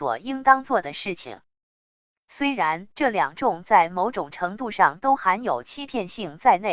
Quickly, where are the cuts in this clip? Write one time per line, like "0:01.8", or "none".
0:02.9